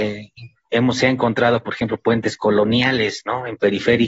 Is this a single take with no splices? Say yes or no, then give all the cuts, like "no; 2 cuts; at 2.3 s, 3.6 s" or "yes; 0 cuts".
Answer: yes; 0 cuts